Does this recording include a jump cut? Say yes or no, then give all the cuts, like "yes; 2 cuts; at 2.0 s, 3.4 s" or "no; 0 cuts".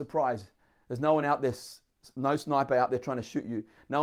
no; 0 cuts